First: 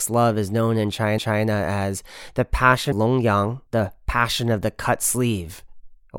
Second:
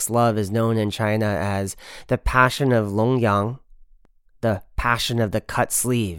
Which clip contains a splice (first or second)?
first